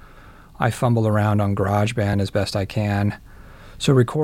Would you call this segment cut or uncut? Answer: uncut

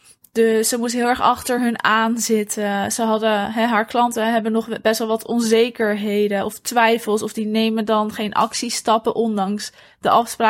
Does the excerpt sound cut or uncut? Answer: uncut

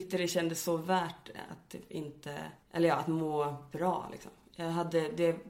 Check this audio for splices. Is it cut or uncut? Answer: cut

